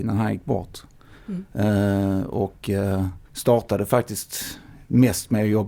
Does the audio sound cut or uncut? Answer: cut